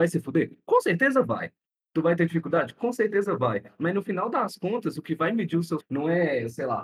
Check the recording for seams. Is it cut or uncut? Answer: cut